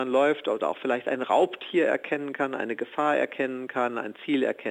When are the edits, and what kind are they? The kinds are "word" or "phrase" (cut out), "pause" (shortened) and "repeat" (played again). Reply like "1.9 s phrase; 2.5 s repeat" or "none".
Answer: none